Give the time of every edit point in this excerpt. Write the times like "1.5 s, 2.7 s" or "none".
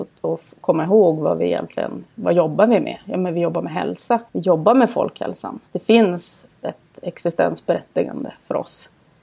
4.3 s, 5.7 s